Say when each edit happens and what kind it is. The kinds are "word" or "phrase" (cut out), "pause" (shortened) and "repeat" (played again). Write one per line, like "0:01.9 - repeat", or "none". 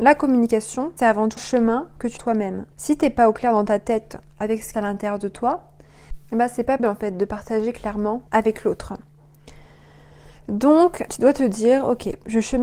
0:01.0 - word
0:01.4 - word
0:02.2 - phrase
0:02.7 - pause
0:04.7 - phrase
0:06.2 - pause
0:06.8 - word
0:08.3 - pause
0:11.1 - word